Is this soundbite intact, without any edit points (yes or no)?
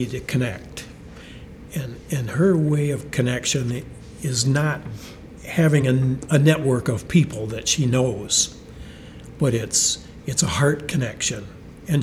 yes